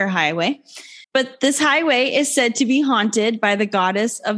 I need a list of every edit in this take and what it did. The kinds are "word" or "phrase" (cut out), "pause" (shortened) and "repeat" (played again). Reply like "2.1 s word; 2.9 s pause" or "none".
1.0 s pause